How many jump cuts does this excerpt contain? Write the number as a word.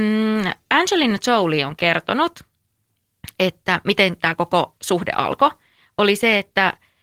zero